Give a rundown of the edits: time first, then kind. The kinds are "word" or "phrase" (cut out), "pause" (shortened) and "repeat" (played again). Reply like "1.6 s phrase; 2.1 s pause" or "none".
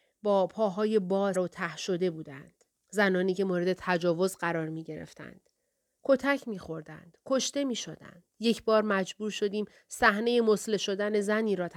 1.3 s word; 2.7 s pause; 8.3 s pause

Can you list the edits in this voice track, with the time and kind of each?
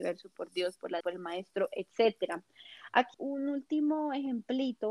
1.0 s word; 3.1 s word

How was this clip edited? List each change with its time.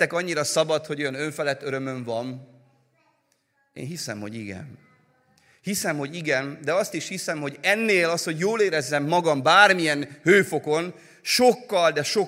none

